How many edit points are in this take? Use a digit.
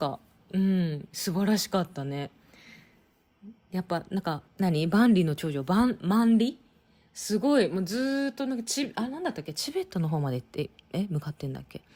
1